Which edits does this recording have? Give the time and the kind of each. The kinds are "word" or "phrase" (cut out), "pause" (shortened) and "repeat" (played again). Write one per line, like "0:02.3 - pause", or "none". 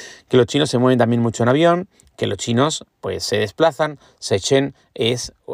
none